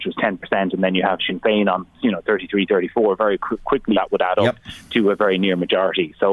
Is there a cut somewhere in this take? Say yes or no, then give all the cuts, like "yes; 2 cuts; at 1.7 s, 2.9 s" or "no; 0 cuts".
yes; 1 cut; at 3.9 s